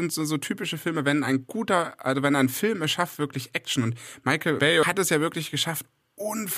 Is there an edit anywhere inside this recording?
no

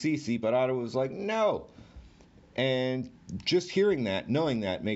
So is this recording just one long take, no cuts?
yes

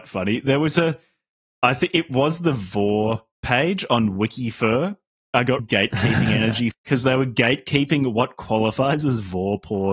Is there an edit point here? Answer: yes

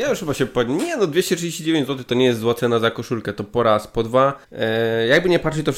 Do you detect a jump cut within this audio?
yes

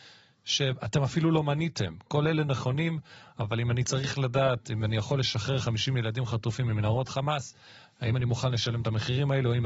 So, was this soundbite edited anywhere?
no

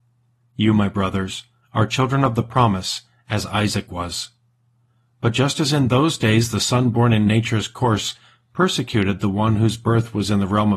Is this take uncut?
yes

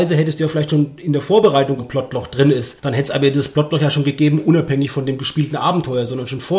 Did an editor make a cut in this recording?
yes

